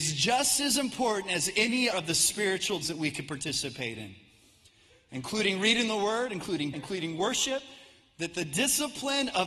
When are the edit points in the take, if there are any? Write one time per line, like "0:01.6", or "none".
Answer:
0:01.9
0:02.8
0:06.7